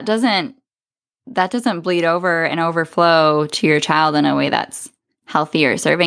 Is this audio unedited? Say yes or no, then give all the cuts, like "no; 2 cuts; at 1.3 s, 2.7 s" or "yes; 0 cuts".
yes; 0 cuts